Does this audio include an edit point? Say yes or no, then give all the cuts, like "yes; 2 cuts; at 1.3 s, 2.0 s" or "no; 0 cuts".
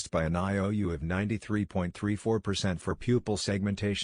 no; 0 cuts